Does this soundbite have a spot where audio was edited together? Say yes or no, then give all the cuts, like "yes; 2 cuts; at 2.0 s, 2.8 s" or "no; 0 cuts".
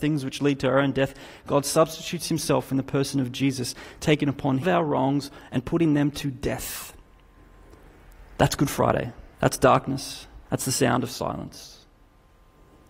yes; 3 cuts; at 4.6 s, 9.3 s, 10.4 s